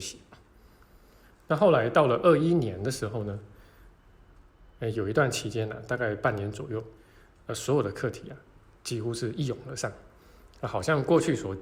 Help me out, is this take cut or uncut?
uncut